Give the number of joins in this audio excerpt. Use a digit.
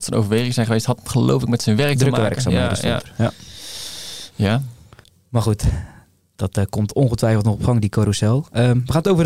1